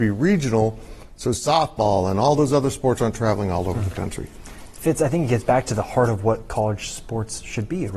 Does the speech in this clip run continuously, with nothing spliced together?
yes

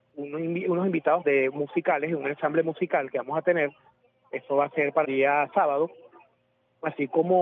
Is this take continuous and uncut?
no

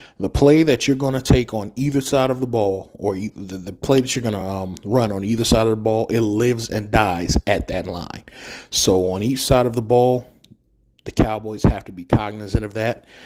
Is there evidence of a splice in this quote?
no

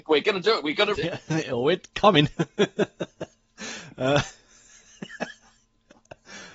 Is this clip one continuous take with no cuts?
no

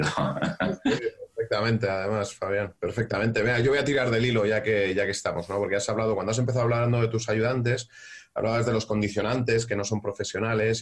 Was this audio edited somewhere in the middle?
no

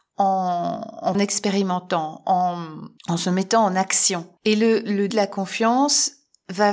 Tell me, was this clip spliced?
yes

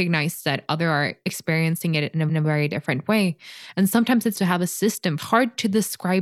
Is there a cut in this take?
yes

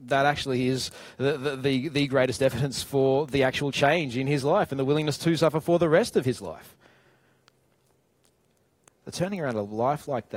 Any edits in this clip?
no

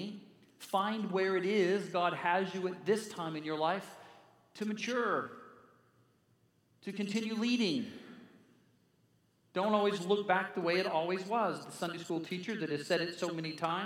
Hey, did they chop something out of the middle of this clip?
no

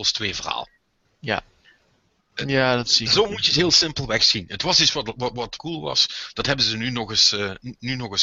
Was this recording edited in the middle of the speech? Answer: yes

